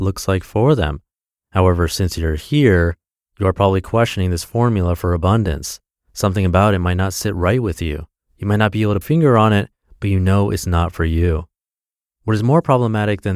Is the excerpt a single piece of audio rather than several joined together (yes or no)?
no